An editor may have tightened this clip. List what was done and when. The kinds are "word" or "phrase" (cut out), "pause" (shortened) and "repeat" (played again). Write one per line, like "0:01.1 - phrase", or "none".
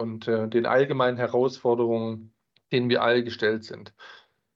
none